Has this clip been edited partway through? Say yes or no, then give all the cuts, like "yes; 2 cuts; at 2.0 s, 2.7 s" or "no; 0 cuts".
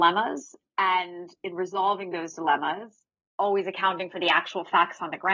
yes; 1 cut; at 3.1 s